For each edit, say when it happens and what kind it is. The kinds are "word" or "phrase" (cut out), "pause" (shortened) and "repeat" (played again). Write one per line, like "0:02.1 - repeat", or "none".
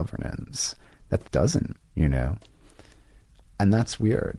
0:01.2 - word
0:01.7 - word